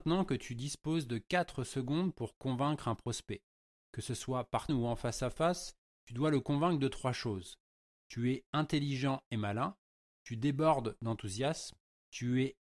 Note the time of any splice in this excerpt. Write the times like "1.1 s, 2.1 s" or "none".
4.7 s